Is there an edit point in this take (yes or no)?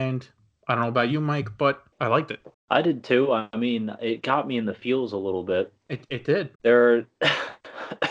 yes